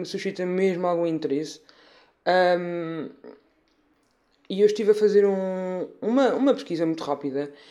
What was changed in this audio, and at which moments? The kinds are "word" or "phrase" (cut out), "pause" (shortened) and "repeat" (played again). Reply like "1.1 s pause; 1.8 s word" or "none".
none